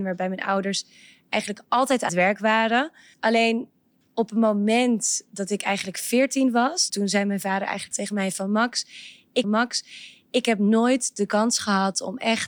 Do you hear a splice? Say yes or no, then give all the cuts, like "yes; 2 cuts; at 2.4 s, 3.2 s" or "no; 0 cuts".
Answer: yes; 5 cuts; at 2.1 s, 3.1 s, 6.9 s, 7.9 s, 9.4 s